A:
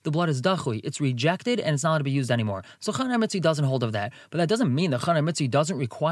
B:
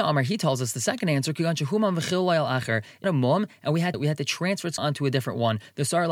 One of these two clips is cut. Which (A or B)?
B